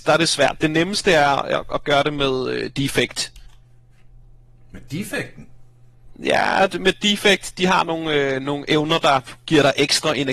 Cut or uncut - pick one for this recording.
uncut